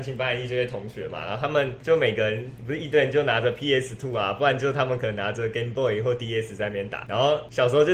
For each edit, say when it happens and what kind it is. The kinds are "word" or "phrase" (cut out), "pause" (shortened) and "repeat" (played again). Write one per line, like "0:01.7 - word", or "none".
none